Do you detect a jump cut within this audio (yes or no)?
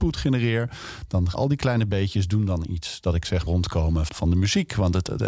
yes